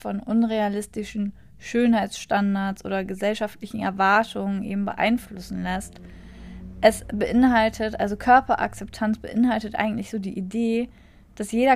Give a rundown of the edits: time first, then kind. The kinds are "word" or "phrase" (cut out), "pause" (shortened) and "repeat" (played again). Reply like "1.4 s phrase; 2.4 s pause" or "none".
none